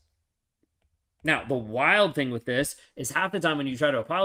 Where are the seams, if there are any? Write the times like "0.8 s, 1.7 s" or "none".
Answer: none